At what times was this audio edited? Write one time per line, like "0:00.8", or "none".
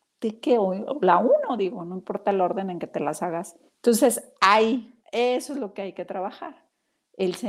0:03.7
0:05.0